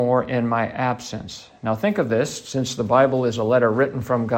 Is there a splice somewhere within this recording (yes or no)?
no